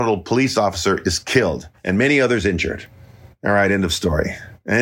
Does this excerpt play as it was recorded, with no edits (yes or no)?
yes